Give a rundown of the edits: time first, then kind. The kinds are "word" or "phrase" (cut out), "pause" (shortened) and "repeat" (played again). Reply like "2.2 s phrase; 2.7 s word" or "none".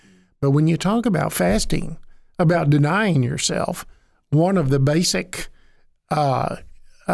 none